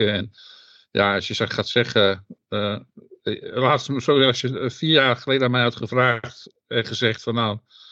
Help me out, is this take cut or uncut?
uncut